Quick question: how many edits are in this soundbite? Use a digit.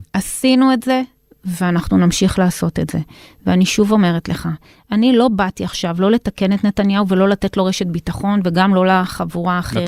0